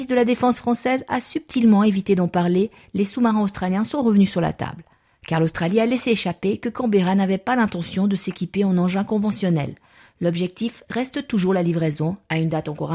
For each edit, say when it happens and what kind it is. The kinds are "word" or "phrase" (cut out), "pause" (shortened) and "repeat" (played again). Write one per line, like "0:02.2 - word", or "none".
none